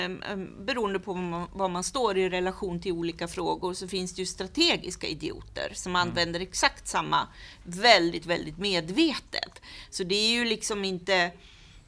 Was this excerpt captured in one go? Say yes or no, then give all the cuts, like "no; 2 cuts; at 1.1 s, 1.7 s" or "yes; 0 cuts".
yes; 0 cuts